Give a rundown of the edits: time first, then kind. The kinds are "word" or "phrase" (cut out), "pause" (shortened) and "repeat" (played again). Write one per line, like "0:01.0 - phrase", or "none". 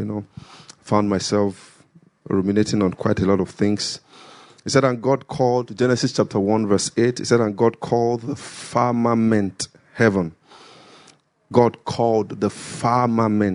none